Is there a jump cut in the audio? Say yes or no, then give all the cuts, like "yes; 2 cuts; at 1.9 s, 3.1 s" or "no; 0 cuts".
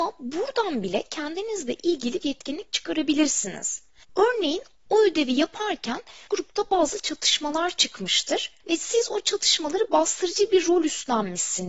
yes; 2 cuts; at 2.2 s, 6.3 s